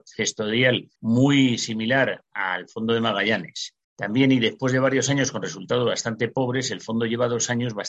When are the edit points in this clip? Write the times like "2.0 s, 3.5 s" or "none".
0.9 s, 3.8 s